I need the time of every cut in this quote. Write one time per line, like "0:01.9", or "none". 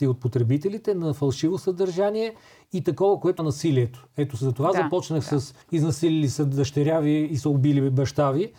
0:03.4
0:05.6